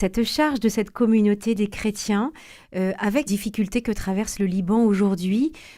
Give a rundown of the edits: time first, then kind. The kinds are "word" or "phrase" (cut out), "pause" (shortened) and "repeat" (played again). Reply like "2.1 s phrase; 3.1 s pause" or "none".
3.3 s word